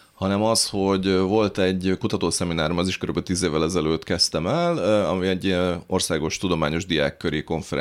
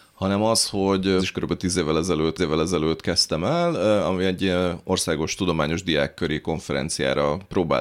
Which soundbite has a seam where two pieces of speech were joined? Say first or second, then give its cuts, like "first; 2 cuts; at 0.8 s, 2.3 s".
second; 2 cuts; at 1.2 s, 2.4 s